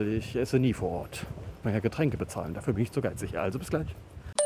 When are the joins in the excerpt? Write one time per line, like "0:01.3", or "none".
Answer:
0:01.6